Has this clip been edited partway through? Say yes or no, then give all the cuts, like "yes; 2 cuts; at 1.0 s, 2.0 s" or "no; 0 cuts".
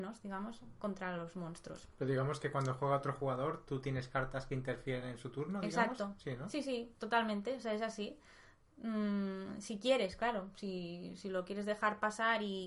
no; 0 cuts